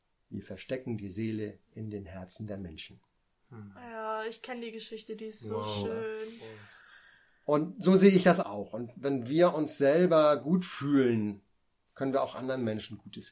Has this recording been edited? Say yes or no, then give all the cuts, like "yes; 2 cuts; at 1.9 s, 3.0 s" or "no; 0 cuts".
yes; 1 cut; at 8.4 s